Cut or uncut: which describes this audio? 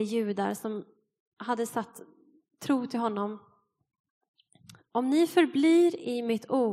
uncut